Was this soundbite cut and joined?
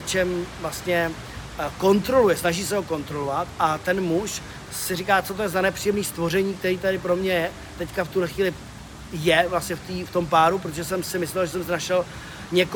no; 0 cuts

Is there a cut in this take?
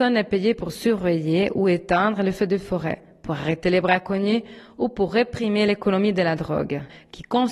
no; 0 cuts

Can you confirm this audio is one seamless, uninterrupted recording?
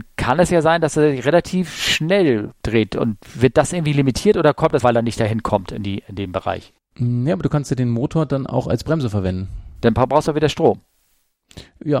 no; 2 cuts; at 4.8 s, 6.8 s

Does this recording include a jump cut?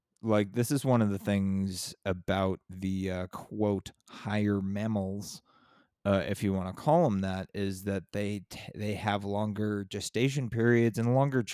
no; 0 cuts

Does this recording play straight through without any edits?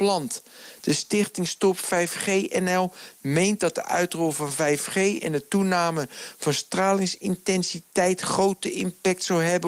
yes; 0 cuts

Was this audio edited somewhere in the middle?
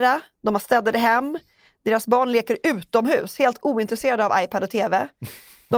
no; 0 cuts

